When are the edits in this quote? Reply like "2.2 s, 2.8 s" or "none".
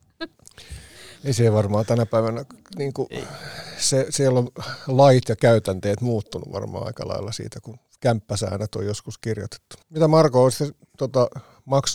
9.8 s